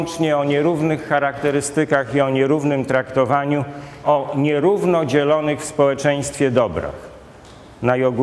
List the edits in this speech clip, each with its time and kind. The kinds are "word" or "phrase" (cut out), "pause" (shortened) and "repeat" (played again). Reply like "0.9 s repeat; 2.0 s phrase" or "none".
4.0 s word